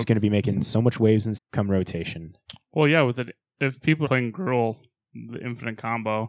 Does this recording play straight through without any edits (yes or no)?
no